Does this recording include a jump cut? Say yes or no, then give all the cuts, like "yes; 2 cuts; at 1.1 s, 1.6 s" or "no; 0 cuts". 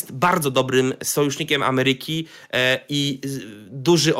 no; 0 cuts